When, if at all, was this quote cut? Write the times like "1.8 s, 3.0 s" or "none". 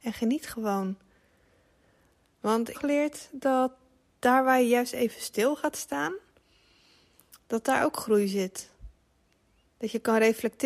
2.7 s

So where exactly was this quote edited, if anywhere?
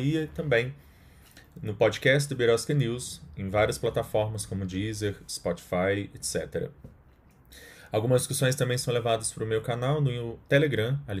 none

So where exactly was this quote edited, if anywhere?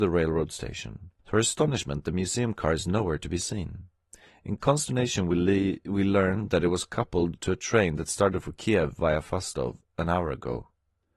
1.2 s

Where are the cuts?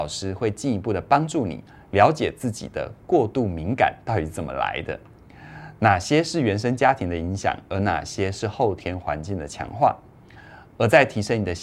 none

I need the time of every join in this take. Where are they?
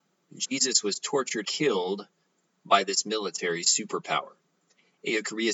1.4 s

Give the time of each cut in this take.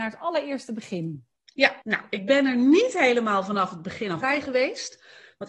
1.8 s, 4.2 s

